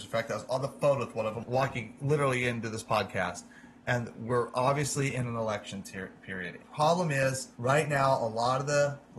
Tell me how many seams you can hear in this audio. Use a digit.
2